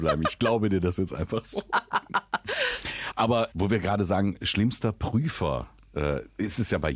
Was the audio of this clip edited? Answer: yes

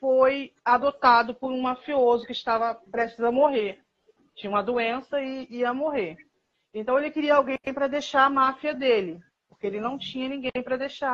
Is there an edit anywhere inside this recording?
no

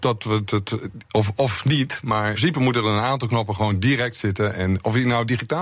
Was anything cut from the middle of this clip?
yes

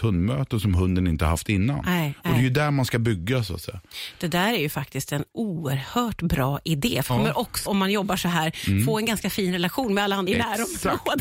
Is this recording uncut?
no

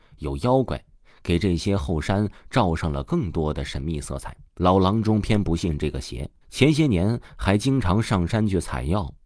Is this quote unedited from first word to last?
no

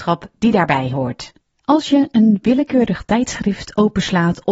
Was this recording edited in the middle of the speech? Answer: no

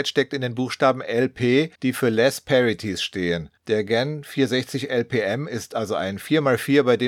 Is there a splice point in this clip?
yes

